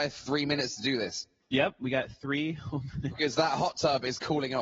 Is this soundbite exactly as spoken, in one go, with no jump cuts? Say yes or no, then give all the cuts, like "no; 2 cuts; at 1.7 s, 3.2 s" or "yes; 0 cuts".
yes; 0 cuts